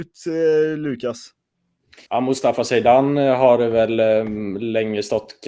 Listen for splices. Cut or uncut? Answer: cut